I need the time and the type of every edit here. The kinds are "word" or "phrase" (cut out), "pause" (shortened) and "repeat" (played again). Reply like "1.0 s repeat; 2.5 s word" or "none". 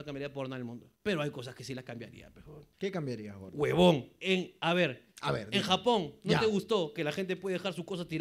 0.9 s pause; 2.7 s pause